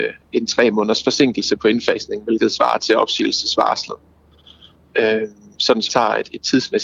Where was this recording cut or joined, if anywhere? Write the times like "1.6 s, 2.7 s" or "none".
5.9 s